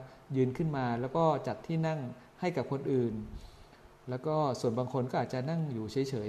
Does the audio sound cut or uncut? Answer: uncut